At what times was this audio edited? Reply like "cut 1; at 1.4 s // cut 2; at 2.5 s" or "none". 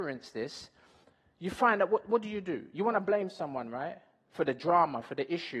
cut 1; at 1.0 s